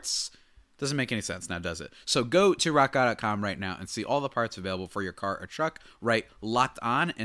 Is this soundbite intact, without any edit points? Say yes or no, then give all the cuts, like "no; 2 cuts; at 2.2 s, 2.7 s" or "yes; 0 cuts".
yes; 0 cuts